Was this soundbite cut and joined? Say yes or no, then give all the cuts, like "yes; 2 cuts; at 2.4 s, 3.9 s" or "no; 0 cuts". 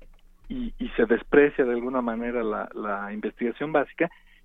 no; 0 cuts